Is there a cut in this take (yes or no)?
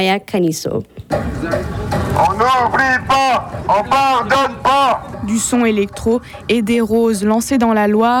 no